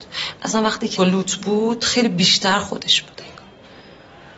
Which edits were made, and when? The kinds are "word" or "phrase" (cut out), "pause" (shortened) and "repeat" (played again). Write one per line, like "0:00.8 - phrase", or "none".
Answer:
0:01.0 - word